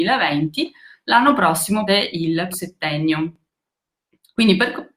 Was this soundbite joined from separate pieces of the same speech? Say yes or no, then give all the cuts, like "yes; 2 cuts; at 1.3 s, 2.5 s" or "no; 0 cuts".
yes; 2 cuts; at 1.9 s, 2.5 s